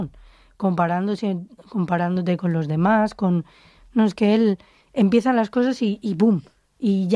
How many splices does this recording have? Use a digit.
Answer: 0